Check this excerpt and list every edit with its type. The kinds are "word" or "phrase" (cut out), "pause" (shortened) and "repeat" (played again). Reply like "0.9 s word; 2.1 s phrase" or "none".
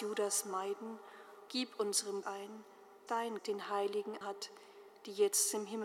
1.5 s word; 2.2 s word; 3.1 s word; 3.4 s word; 4.2 s word